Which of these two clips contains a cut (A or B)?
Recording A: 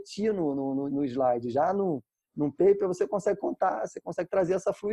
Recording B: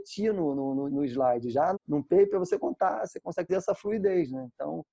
B